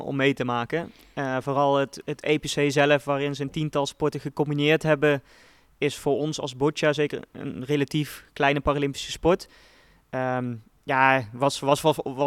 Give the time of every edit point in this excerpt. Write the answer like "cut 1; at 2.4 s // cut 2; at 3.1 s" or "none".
none